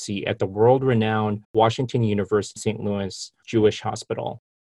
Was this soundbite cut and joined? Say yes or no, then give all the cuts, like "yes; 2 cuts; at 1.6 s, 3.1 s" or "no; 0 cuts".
yes; 3 cuts; at 1.4 s, 2.6 s, 3.4 s